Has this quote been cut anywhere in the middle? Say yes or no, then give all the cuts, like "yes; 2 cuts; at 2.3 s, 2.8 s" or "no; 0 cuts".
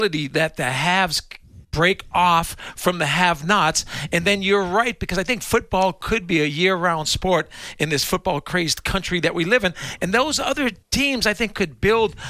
yes; 2 cuts; at 1.6 s, 10.8 s